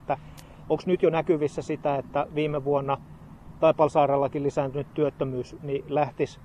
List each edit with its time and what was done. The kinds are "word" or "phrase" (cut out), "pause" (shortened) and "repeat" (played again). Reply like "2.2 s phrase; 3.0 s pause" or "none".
none